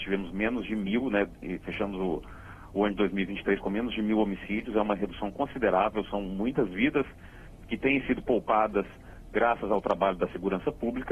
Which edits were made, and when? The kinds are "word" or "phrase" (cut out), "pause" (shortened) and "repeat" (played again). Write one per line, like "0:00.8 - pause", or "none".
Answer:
none